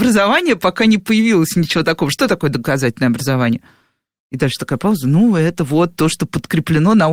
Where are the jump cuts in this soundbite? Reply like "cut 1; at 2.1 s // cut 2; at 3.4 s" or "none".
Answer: none